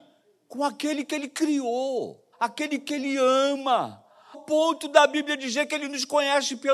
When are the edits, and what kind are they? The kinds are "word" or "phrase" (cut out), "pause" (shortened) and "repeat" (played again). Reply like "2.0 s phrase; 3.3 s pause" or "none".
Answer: 2.3 s pause; 4.3 s word